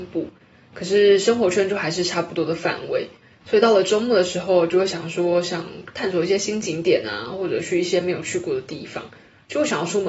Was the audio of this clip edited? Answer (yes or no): no